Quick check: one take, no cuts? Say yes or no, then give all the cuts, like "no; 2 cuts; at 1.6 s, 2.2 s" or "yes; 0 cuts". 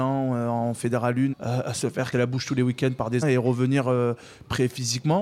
no; 3 cuts; at 1.3 s, 2.1 s, 3.2 s